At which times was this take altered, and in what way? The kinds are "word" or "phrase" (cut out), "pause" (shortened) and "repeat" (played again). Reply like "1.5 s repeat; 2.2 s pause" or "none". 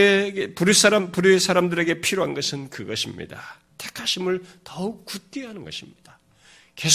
none